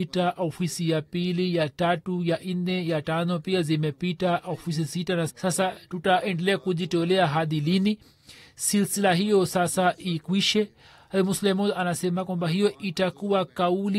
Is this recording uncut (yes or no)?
no